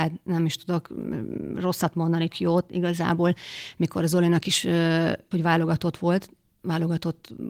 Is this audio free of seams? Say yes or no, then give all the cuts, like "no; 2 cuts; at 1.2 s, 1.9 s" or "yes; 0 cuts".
no; 2 cuts; at 2.3 s, 5.3 s